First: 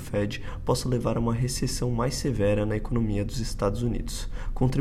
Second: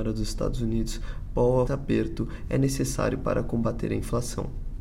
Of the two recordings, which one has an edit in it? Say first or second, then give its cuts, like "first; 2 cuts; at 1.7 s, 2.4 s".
second; 1 cut; at 1.7 s